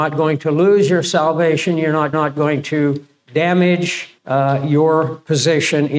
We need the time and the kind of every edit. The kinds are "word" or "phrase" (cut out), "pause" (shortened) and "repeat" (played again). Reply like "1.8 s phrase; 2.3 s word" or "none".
2.1 s repeat; 4.2 s pause